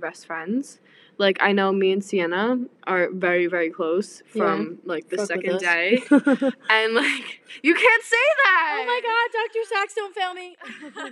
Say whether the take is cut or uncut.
uncut